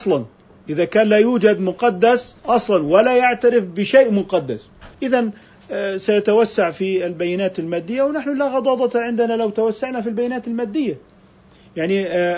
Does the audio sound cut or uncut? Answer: cut